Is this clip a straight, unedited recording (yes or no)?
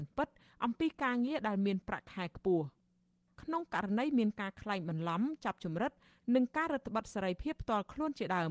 yes